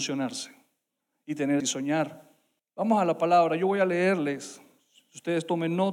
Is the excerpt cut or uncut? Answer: cut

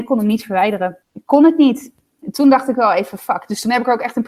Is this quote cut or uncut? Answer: cut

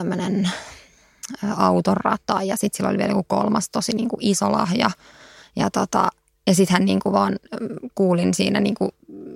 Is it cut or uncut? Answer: uncut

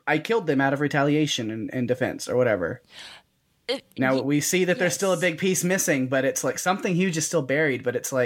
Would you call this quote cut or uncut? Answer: uncut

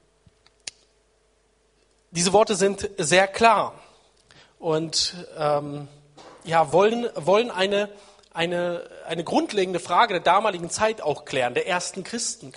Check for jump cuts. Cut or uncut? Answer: uncut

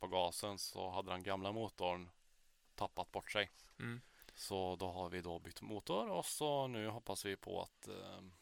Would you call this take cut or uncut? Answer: cut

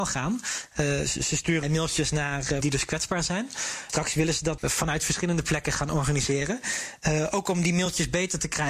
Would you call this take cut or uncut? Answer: cut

